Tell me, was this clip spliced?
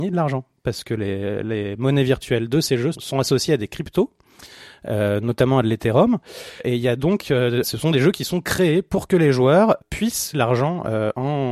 yes; 3 cuts; at 2.9 s, 7.6 s, 10.3 s

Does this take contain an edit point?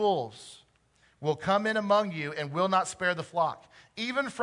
no; 0 cuts

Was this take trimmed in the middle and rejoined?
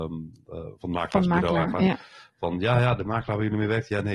no; 0 cuts

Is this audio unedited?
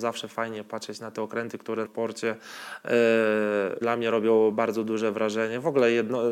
no; 2 cuts; at 1.8 s, 3.8 s

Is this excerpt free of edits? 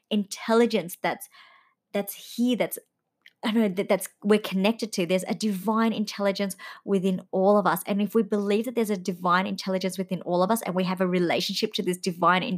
yes; 0 cuts

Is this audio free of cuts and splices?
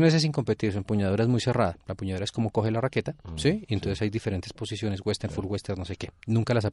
yes; 0 cuts

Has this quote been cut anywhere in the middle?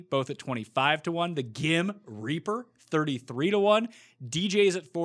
no; 0 cuts

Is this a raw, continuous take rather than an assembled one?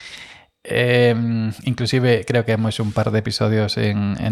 yes; 0 cuts

